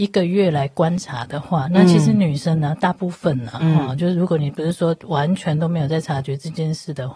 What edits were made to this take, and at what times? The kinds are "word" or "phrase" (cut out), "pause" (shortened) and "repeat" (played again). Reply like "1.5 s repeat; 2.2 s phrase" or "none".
none